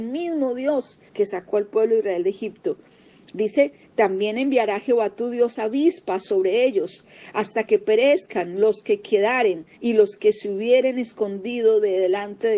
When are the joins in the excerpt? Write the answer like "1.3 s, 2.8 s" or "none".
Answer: 1.1 s, 9.7 s